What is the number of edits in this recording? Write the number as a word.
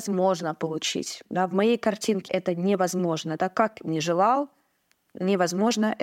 two